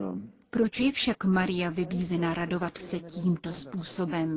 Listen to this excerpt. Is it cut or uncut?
uncut